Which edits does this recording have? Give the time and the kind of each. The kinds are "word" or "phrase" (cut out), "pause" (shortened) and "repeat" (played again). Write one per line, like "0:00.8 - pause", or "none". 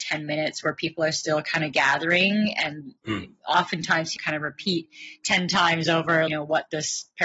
0:04.2 - word
0:06.3 - phrase